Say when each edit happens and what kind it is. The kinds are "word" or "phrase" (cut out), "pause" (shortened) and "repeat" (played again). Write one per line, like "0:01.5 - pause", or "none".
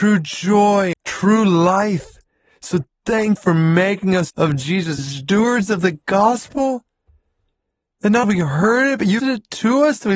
0:00.9 - word
0:03.4 - word
0:04.3 - word
0:05.0 - word
0:08.2 - word
0:09.2 - word